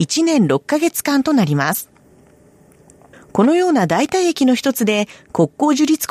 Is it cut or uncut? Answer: uncut